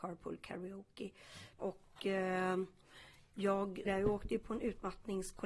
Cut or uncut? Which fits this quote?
cut